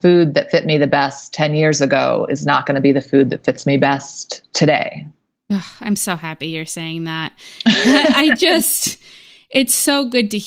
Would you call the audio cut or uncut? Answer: uncut